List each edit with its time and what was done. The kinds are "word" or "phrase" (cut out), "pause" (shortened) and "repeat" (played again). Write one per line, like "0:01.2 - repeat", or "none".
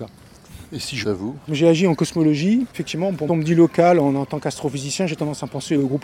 0:01.0 - word
0:01.5 - word
0:02.7 - pause
0:03.3 - phrase